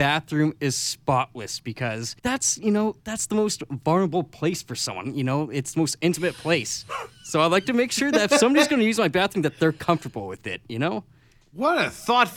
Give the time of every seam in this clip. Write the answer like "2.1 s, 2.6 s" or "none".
2.2 s, 3.0 s

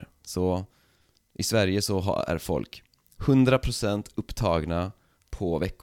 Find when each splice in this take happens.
none

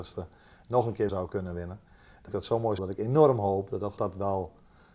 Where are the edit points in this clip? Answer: 1.1 s, 2.3 s, 2.8 s, 4.0 s

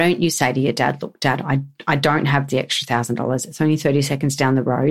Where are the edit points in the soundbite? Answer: none

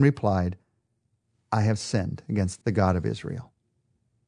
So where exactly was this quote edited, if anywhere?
2.6 s

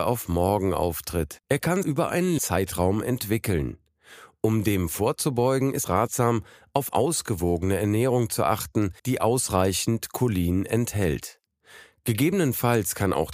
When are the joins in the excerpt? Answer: 1.4 s, 1.8 s, 2.4 s, 5.8 s, 6.9 s, 9.0 s

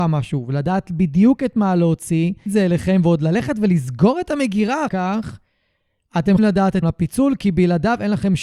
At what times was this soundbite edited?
2.5 s, 4.9 s, 6.4 s, 6.8 s

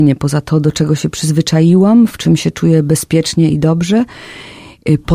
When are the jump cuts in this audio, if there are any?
none

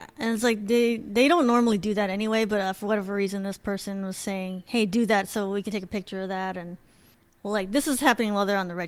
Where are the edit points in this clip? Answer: none

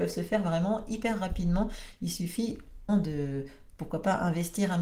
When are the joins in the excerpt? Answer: 2.9 s

